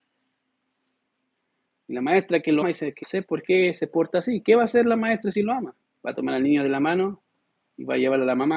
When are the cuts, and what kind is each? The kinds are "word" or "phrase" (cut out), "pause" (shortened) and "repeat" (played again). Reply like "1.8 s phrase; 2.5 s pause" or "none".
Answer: 2.6 s word; 3.0 s word; 5.9 s pause